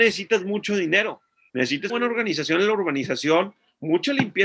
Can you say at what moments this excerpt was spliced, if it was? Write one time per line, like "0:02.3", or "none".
0:01.9